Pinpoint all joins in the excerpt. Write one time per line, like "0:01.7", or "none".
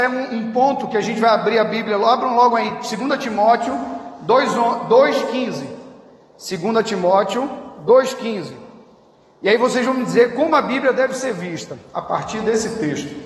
none